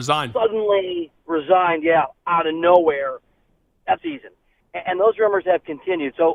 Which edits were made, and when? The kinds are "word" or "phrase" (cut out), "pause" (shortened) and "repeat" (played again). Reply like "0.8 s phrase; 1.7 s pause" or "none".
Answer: 4.0 s phrase